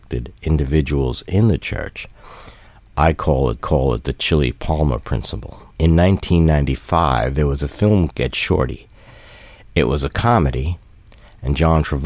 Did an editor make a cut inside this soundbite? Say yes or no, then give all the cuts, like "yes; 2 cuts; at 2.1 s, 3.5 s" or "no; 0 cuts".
yes; 3 cuts; at 3.6 s, 5.7 s, 8.1 s